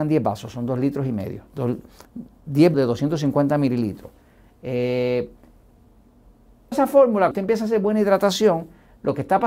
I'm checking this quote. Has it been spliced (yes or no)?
yes